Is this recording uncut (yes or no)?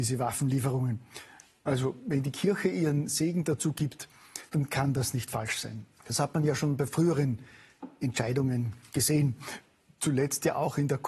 no